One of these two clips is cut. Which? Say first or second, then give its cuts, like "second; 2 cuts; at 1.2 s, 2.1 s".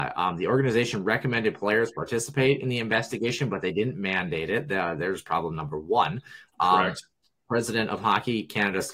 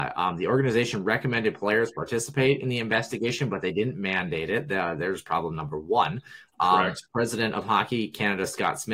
second; 1 cut; at 7.1 s